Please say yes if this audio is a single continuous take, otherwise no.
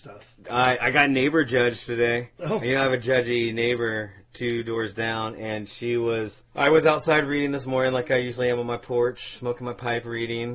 no